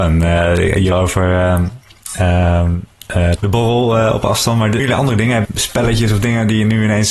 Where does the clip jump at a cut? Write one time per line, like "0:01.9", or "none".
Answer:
0:00.9
0:03.4
0:04.8
0:05.4